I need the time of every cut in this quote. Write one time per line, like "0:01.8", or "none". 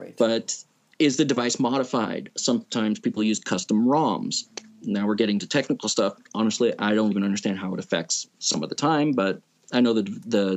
0:06.2
0:07.1